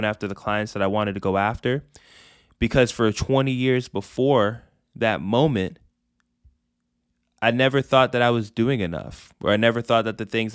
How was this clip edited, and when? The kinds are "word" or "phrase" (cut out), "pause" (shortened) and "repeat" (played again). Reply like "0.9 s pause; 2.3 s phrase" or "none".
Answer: none